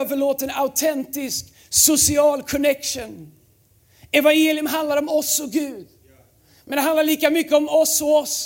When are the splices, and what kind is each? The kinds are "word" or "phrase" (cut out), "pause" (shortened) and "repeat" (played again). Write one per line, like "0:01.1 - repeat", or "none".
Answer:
none

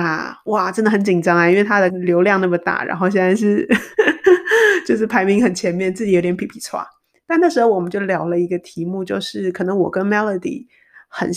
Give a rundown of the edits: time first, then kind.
0:01.9 - word

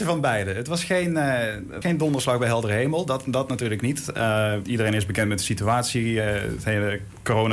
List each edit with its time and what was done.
0:01.8 - word
0:04.6 - word

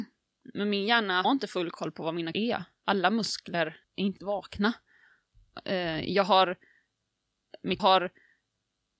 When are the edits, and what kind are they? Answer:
0:01.2 - word
0:02.3 - word
0:03.8 - pause
0:04.2 - word
0:07.8 - repeat

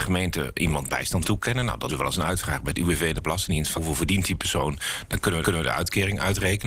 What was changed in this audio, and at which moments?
0:01.2 - word
0:01.9 - word
0:03.8 - word
0:05.4 - repeat

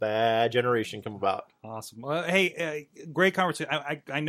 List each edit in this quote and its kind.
0:01.6 - pause

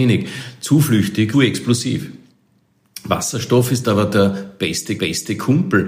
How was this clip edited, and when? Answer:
0:01.3 - word
0:05.0 - repeat

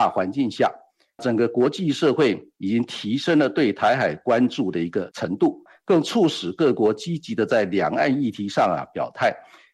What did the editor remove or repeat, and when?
none

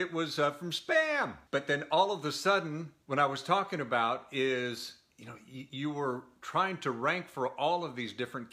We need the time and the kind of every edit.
0:01.5 - pause
0:03.0 - pause

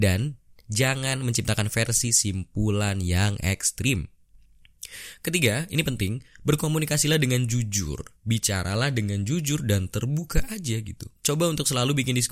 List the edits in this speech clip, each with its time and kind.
0:08.2 - pause
0:11.2 - pause

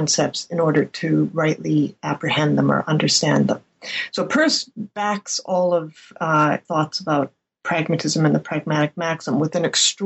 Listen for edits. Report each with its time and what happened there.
0:06.7 - word

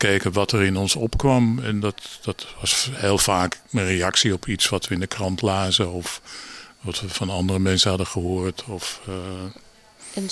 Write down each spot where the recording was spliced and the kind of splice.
0:03.6 - pause

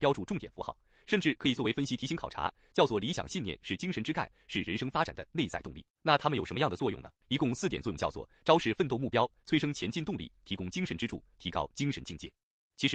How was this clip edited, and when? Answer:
0:05.9 - pause
0:07.2 - pause

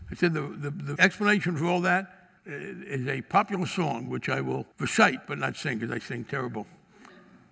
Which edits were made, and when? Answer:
0:01.0 - word
0:02.4 - pause
0:04.7 - pause

